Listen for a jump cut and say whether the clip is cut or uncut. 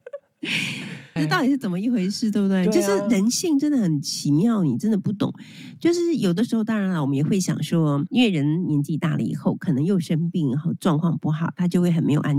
cut